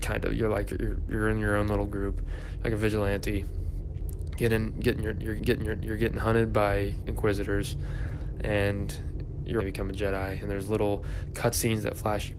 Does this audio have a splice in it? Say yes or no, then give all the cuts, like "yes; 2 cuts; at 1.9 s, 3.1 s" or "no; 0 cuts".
yes; 2 cuts; at 5.4 s, 9.6 s